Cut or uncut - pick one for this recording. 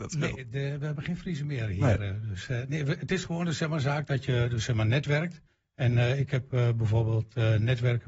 cut